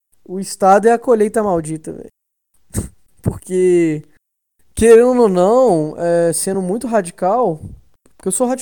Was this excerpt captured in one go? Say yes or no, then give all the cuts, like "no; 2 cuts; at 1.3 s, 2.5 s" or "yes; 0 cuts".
yes; 0 cuts